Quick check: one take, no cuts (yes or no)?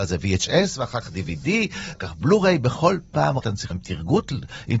no